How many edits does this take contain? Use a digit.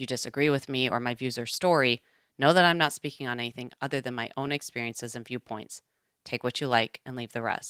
0